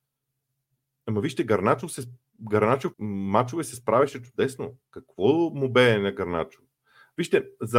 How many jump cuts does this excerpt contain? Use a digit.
1